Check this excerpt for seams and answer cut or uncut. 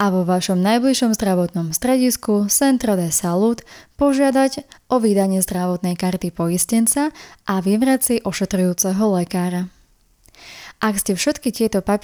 uncut